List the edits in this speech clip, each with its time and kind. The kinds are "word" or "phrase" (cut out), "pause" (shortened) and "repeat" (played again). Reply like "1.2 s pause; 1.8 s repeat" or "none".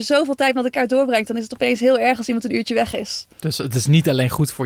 3.3 s pause